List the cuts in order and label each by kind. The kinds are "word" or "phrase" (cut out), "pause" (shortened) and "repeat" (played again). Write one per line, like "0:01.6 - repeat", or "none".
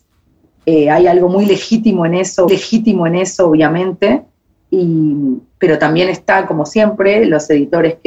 0:02.5 - repeat